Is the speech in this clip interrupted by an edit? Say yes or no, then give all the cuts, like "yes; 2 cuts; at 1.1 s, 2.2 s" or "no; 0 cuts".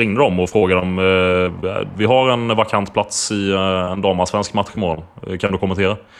no; 0 cuts